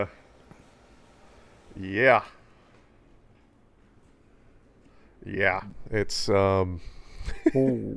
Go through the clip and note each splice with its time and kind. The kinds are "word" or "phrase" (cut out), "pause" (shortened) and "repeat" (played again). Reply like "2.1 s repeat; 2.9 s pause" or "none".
none